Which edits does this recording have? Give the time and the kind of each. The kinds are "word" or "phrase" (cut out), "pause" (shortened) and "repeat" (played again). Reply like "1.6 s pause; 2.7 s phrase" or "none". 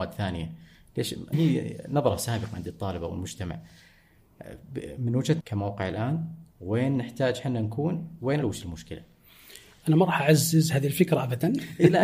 1.3 s word; 5.4 s phrase; 6.5 s pause; 8.4 s word

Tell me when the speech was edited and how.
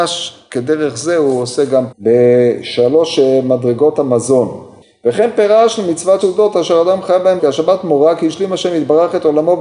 1.9 s word; 6.2 s word; 7.4 s word

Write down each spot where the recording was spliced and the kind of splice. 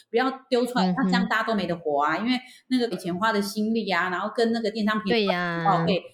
1.0 s word; 2.9 s word

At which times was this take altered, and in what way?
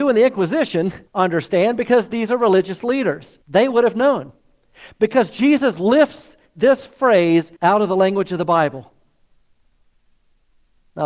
1.1 s pause; 3.4 s pause; 7.6 s pause

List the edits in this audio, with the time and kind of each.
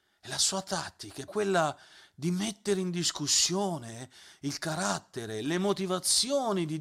1.3 s word

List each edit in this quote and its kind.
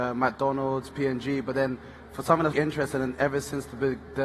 2.5 s word

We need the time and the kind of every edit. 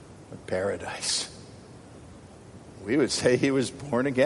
none

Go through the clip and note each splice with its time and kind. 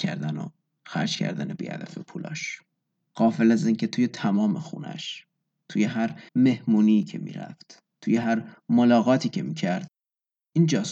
5.4 s pause; 6.3 s pause; 7.9 s pause

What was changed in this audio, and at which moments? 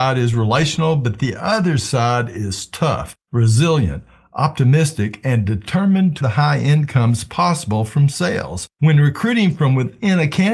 3.2 s pause; 6.2 s phrase; 8.7 s pause

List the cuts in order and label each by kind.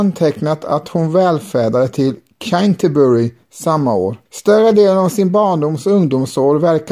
4.3 s pause

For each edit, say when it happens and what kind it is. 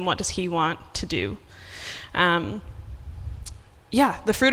none

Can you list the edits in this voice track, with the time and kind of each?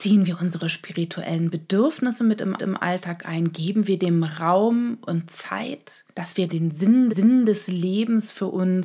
2.6 s repeat; 6.1 s pause; 6.5 s word; 7.1 s repeat

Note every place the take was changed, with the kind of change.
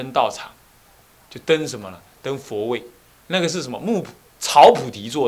none

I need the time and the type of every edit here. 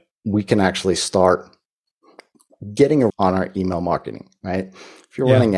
3.1 s word

